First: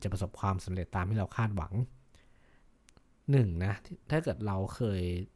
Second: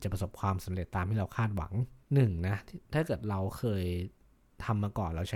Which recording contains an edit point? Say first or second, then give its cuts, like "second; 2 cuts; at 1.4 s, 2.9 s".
second; 1 cut; at 2.0 s